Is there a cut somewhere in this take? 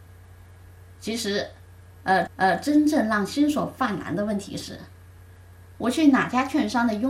yes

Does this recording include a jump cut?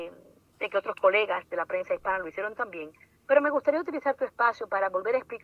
no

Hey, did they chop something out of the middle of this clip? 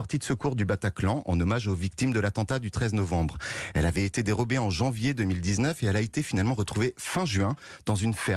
no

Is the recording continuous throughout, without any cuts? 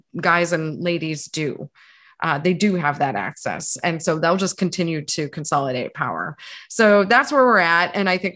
yes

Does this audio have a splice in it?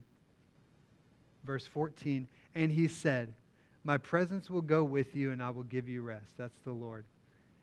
no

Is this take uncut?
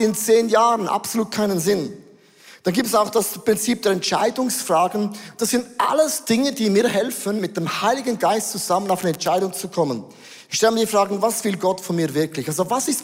yes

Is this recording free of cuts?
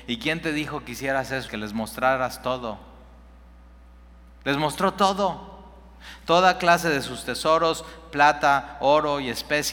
no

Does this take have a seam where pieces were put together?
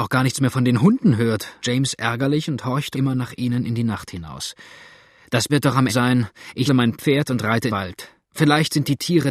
yes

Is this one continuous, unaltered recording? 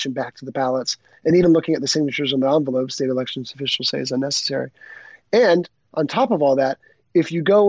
yes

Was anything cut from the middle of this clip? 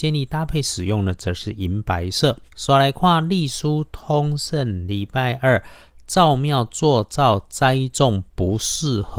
yes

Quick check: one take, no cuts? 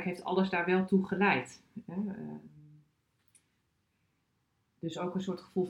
yes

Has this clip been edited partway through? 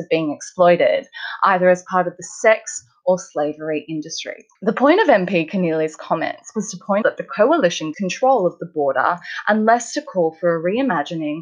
yes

